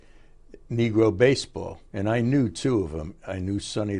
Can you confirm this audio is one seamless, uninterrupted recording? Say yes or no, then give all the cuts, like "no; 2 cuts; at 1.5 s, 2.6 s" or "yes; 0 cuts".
no; 1 cut; at 1.9 s